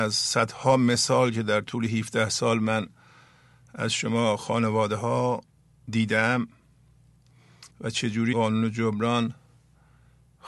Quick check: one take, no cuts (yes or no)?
no